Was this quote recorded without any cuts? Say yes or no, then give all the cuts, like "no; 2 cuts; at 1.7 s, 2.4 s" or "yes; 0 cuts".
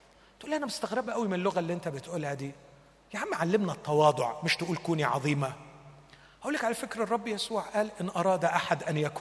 yes; 0 cuts